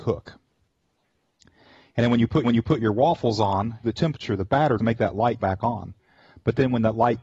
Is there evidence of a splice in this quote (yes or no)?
yes